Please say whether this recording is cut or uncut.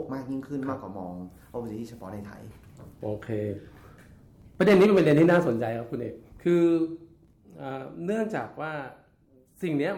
uncut